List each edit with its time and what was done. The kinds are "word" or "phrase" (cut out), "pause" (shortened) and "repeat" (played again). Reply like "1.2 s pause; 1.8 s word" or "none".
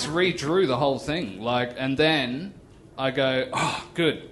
none